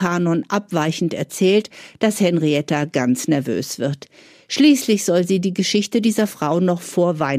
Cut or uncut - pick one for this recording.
uncut